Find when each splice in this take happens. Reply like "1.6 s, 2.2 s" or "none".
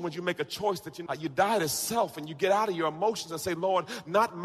1.1 s

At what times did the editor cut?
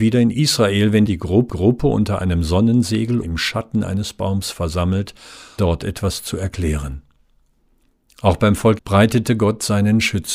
1.1 s, 1.5 s, 3.2 s, 5.6 s, 8.8 s

